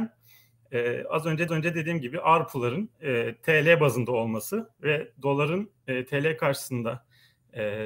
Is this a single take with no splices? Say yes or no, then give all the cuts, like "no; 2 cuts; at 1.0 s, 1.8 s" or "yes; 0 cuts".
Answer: no; 2 cuts; at 1.5 s, 2.9 s